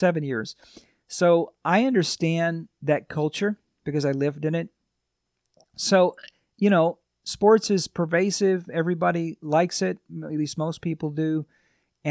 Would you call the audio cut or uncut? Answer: uncut